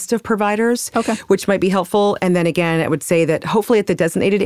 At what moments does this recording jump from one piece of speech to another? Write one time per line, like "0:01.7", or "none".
none